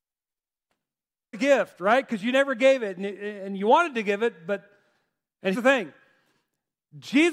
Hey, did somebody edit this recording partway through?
yes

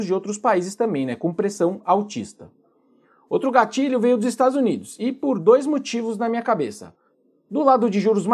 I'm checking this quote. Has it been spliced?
no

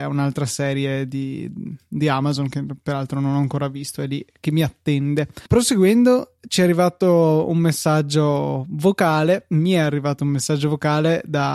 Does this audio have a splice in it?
yes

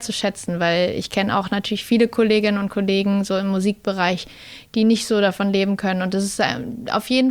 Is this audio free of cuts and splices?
yes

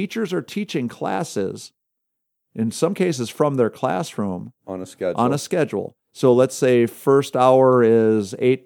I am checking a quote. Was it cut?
no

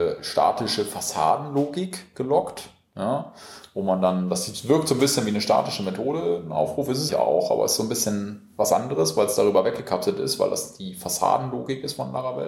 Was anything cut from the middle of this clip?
yes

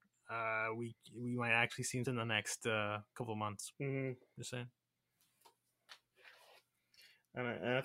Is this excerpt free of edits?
no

